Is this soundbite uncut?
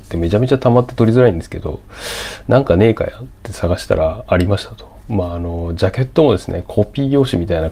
yes; 0 cuts

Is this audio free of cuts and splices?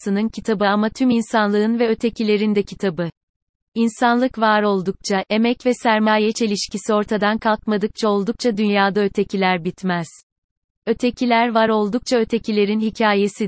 yes; 0 cuts

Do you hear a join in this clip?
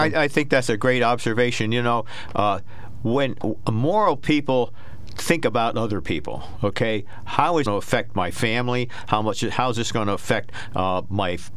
yes; 1 cut; at 7.7 s

